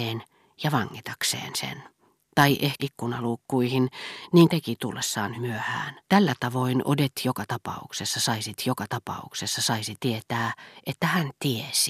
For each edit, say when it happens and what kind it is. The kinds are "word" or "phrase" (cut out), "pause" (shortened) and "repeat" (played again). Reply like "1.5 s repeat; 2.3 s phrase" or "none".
2.1 s pause; 2.8 s phrase; 4.5 s phrase; 5.3 s word; 6.0 s pause; 8.6 s repeat